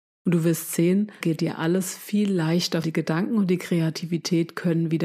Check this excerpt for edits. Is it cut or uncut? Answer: cut